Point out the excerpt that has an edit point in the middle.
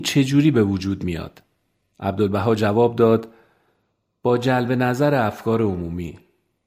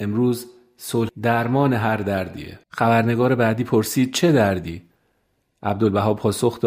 second; 2 cuts; at 1.1 s, 2.6 s

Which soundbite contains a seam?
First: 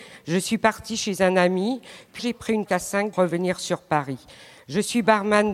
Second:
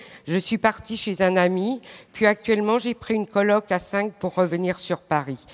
first; 3 cuts; at 2.2 s, 2.7 s, 3.1 s

